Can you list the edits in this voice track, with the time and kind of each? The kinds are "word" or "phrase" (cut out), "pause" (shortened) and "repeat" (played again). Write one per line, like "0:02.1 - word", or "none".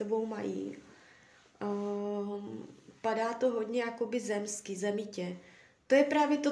none